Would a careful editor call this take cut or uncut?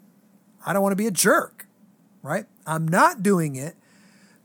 uncut